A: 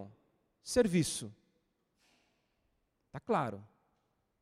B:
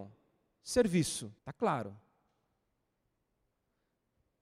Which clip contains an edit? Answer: B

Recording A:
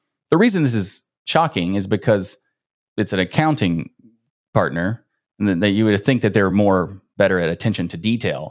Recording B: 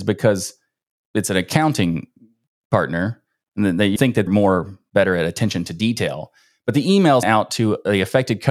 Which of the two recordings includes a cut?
B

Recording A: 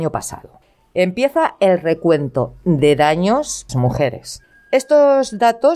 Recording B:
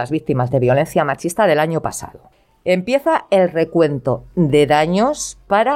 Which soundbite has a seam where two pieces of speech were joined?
A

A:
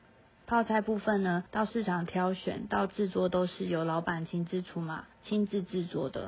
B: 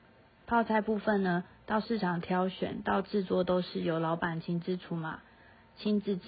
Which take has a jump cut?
A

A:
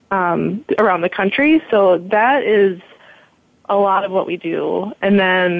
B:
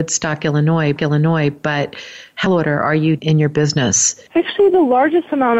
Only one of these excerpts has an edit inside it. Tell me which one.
B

